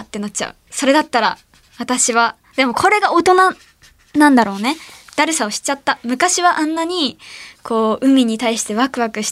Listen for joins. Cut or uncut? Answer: uncut